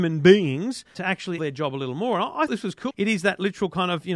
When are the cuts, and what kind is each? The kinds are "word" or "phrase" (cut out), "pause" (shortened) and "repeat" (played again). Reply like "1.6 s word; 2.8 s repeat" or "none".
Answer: 0.9 s word; 1.4 s word; 2.5 s word; 2.9 s word